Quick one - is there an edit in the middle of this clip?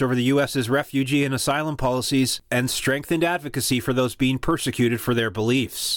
no; 0 cuts

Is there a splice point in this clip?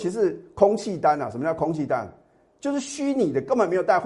no; 0 cuts

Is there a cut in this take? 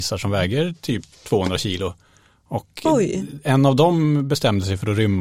yes; 1 cut; at 1.1 s

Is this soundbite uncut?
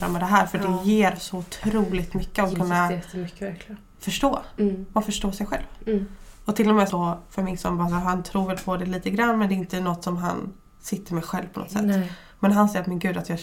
no; 2 cuts; at 2.5 s, 6.9 s

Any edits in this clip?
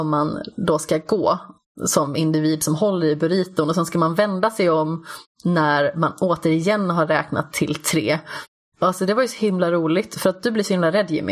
no; 0 cuts

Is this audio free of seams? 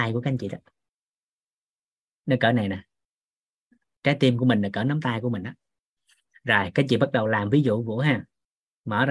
yes; 0 cuts

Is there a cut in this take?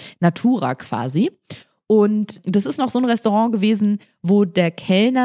no; 0 cuts

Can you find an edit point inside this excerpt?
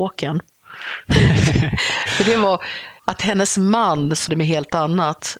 yes; 2 cuts; at 3.0 s, 4.3 s

